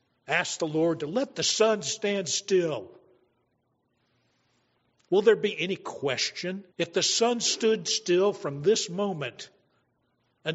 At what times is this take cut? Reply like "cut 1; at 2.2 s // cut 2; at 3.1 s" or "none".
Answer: cut 1; at 6.7 s